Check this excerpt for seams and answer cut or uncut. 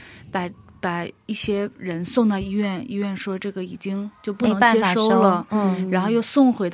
uncut